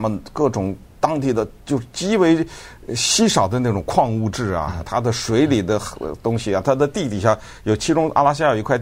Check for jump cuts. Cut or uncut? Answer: cut